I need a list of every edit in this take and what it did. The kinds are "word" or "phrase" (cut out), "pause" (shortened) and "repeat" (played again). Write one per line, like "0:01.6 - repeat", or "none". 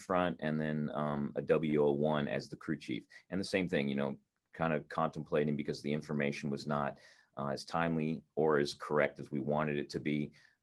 none